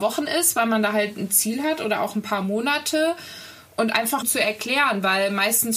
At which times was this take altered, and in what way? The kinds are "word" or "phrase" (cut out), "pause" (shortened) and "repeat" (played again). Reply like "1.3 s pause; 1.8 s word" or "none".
4.2 s phrase